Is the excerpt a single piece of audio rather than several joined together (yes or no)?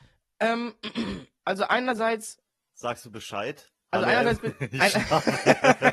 yes